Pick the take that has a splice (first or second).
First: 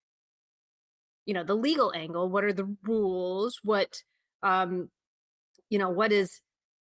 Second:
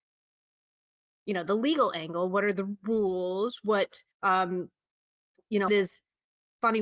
second